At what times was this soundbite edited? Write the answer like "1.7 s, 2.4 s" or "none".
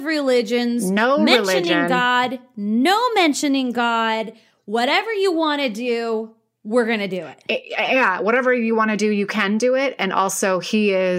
none